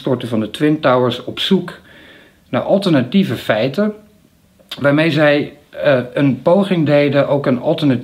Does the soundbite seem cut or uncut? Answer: uncut